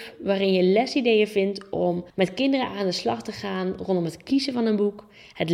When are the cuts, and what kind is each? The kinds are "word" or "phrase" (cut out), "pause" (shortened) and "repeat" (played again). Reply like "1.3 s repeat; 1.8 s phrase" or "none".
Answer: 2.1 s pause